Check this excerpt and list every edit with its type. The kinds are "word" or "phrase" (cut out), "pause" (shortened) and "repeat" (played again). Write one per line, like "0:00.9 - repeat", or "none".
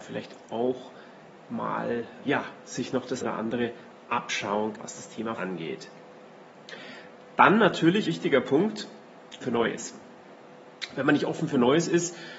0:02.2 - word
0:03.2 - word
0:04.7 - word
0:05.4 - word
0:08.1 - word
0:09.4 - word